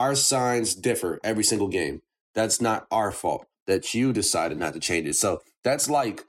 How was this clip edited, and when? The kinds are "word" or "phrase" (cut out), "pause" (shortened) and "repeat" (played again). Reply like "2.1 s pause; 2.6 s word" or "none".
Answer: none